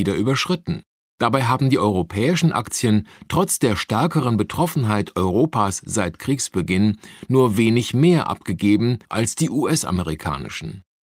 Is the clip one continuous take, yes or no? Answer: no